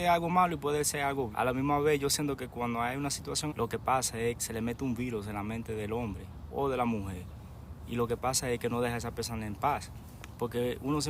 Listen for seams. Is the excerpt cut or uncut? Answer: cut